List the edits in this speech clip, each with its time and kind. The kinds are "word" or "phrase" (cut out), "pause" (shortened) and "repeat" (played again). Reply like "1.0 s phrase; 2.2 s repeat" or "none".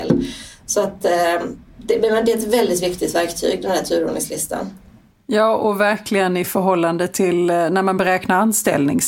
none